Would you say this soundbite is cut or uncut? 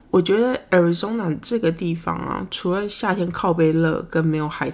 uncut